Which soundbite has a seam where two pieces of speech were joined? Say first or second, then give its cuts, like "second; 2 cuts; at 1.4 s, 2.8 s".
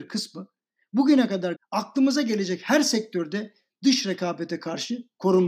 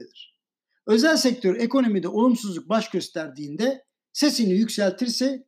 first; 1 cut; at 1.5 s